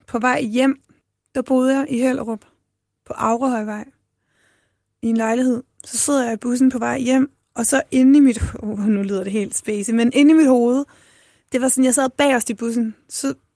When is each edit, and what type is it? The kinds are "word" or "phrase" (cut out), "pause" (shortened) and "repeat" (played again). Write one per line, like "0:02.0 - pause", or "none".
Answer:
none